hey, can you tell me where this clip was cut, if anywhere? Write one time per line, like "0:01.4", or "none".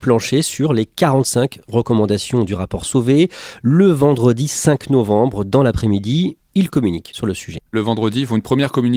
0:07.7